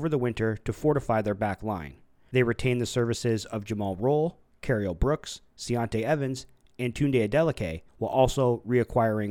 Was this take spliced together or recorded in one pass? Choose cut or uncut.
cut